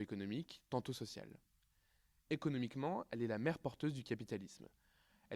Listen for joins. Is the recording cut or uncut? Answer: uncut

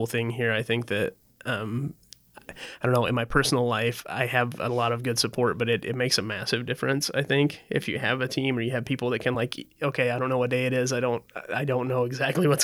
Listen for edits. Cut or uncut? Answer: uncut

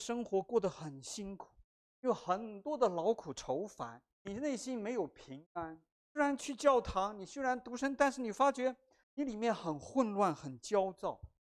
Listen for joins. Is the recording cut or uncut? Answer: cut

